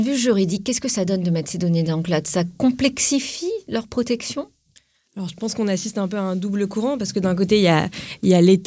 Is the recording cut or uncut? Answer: uncut